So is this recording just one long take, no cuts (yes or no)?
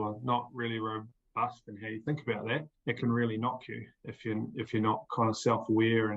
no